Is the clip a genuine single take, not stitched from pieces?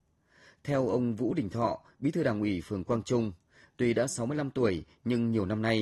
yes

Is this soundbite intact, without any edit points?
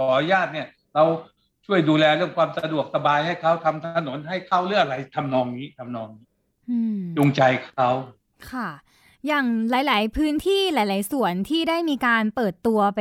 yes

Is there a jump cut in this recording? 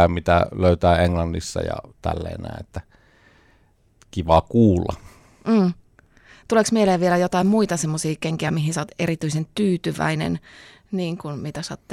no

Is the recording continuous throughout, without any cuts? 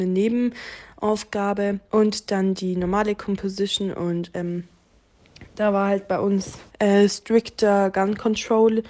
no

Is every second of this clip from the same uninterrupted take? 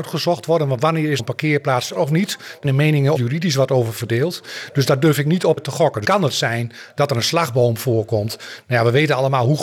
no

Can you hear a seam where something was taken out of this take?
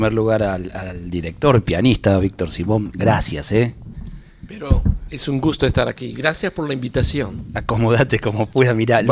no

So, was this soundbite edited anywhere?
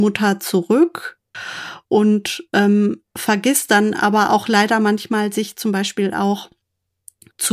no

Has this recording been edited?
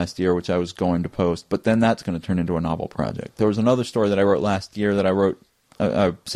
no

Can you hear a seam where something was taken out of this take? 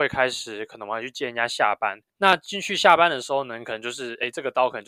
yes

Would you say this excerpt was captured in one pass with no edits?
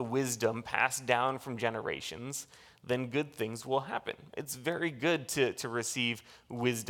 yes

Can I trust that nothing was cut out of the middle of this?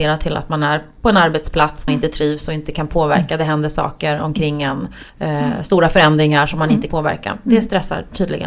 no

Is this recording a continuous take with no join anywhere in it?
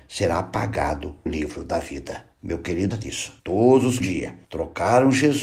no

